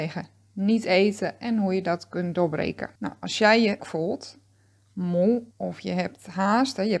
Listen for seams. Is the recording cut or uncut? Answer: cut